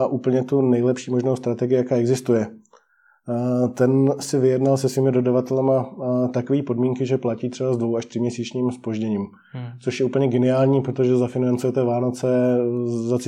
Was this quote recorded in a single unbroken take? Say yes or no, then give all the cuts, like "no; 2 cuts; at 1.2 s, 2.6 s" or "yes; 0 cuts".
yes; 0 cuts